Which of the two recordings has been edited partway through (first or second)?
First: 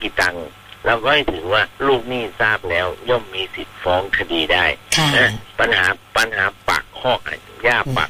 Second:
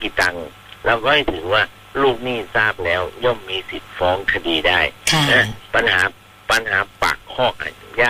first